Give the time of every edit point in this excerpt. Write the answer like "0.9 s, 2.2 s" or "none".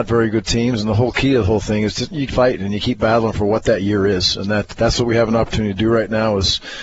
2.3 s, 4.7 s